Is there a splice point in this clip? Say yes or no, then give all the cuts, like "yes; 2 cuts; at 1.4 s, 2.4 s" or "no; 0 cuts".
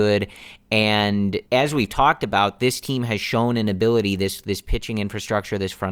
yes; 1 cut; at 1.4 s